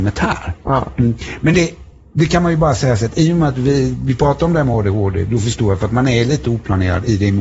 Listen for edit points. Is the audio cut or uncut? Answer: uncut